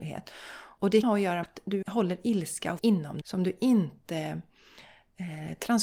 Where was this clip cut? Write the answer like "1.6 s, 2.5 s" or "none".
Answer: 1.0 s, 1.4 s, 1.8 s, 2.8 s, 3.2 s